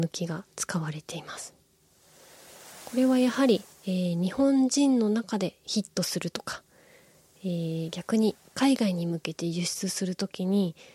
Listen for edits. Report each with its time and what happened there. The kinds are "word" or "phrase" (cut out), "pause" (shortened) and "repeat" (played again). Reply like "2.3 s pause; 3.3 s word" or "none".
3.7 s pause